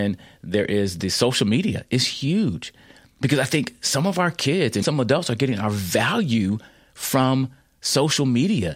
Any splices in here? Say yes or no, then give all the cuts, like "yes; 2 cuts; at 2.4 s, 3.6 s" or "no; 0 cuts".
yes; 1 cut; at 4.8 s